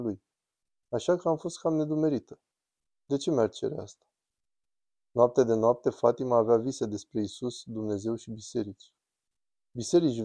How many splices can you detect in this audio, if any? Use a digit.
0